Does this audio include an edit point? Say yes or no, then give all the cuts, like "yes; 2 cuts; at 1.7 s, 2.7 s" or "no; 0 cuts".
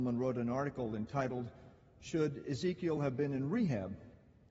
no; 0 cuts